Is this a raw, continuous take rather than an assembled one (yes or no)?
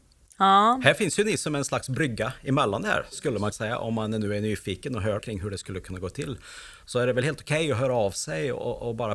no